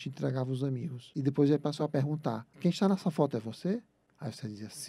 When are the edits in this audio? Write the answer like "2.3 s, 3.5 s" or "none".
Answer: none